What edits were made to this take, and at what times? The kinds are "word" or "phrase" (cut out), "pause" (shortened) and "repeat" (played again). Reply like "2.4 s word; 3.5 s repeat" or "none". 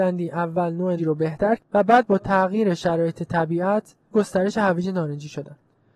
1.0 s word; 1.6 s word; 4.1 s word

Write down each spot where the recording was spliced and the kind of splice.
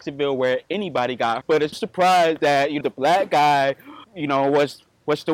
1.4 s word; 1.7 s word; 2.8 s word; 4.0 s word

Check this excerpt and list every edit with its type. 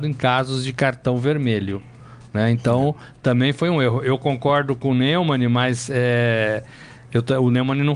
none

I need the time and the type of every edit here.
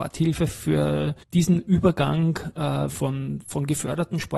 1.2 s pause; 2.9 s word

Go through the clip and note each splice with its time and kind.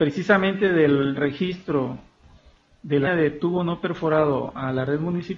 1.2 s word; 3.1 s word

